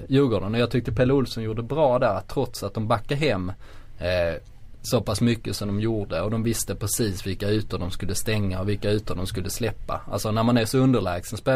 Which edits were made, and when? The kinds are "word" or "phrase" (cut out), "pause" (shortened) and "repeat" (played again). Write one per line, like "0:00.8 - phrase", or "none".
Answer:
none